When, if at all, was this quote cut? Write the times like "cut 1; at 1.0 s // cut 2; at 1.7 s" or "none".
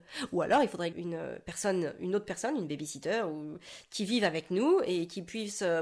cut 1; at 0.9 s